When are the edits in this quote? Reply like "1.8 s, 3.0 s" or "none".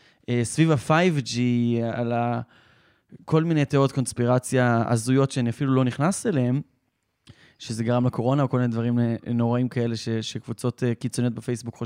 none